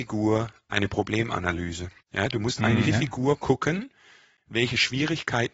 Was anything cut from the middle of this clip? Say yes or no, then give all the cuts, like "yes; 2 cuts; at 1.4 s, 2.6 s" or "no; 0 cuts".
yes; 2 cuts; at 2.0 s, 2.8 s